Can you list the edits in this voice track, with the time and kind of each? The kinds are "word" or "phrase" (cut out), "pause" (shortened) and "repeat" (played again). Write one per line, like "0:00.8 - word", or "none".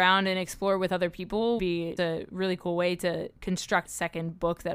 0:01.6 - word
0:02.0 - word
0:03.8 - word